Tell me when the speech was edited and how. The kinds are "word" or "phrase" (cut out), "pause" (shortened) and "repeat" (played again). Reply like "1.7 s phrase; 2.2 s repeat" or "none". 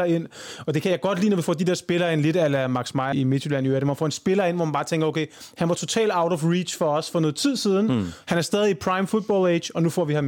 3.1 s word